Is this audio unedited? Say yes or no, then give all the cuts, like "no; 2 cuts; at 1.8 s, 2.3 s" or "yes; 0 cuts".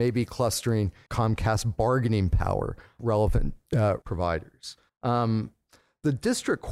no; 4 cuts; at 1.1 s, 3.0 s, 4.0 s, 4.9 s